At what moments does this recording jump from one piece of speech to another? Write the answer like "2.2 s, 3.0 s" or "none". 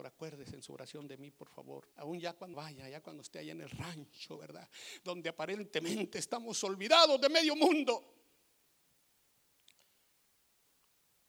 1.9 s, 2.5 s